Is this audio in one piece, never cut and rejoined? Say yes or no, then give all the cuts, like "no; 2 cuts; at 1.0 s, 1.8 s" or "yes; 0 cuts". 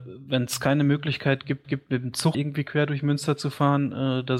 no; 2 cuts; at 1.6 s, 2.3 s